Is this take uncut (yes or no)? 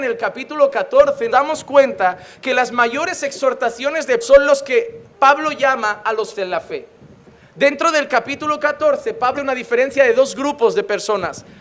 no